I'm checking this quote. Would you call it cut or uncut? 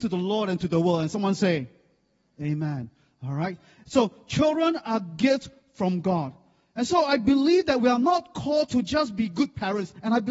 uncut